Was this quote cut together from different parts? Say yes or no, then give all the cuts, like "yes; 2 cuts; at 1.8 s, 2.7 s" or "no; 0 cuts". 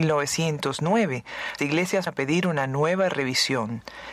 yes; 2 cuts; at 1.6 s, 2.1 s